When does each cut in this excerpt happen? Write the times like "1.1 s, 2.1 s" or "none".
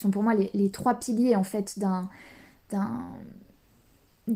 none